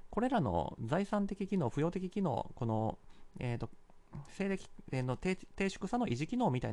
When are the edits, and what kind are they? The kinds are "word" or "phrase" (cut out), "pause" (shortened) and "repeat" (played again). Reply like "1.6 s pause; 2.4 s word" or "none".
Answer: none

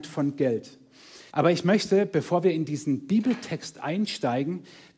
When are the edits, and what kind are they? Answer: 1.3 s pause

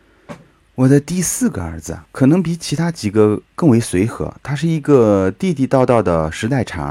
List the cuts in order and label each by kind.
2.0 s pause; 3.5 s pause

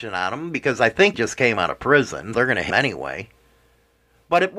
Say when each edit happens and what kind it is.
1.1 s word; 2.3 s word; 2.7 s word

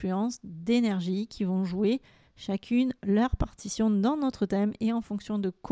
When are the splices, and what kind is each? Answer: none

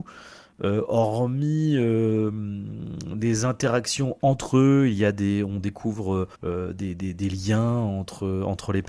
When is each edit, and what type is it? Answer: 6.3 s pause

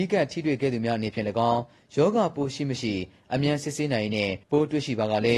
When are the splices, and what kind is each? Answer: 4.4 s pause

